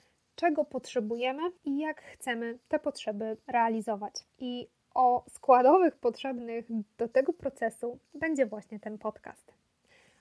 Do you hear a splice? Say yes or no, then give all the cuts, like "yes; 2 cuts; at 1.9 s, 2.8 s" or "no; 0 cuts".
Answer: yes; 3 cuts; at 1.6 s, 4.3 s, 8.0 s